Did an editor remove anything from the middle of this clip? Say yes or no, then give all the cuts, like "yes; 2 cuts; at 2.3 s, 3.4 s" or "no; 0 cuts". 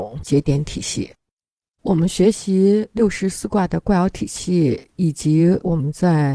no; 0 cuts